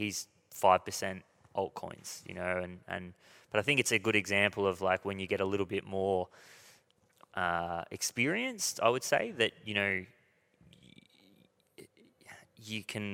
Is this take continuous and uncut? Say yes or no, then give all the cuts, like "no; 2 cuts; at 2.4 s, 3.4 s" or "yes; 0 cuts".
yes; 0 cuts